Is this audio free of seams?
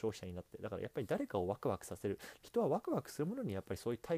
no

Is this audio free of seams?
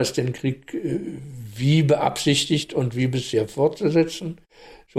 yes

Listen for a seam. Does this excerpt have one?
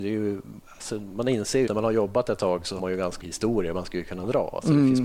yes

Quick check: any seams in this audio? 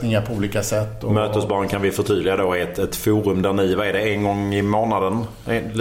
no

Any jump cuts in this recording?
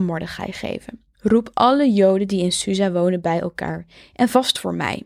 yes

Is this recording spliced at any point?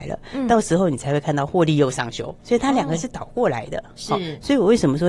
yes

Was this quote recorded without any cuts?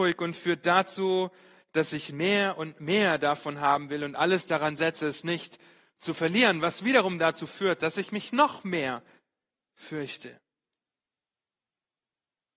yes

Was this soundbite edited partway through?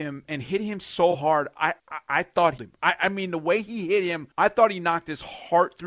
yes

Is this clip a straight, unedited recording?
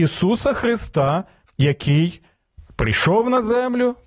yes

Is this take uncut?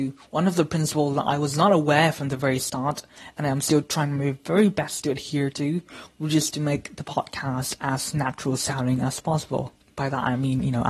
yes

